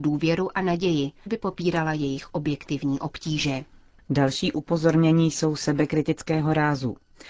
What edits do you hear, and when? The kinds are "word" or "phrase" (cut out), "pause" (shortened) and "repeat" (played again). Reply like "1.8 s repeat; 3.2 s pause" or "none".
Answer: 1.3 s word